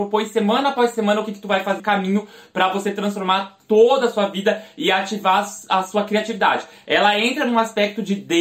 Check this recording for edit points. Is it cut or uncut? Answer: cut